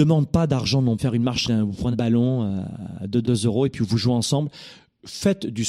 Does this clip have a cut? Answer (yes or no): yes